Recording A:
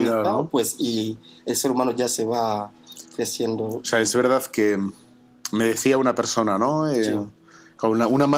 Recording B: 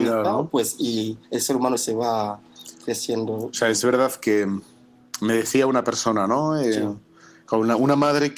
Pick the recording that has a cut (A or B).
B